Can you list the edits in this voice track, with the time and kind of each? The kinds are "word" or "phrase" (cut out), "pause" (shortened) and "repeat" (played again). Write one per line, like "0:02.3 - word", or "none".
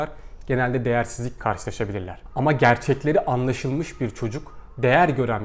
0:01.4 - word